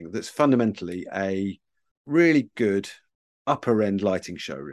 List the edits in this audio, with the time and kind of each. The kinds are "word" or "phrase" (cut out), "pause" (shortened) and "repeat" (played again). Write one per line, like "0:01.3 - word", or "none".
none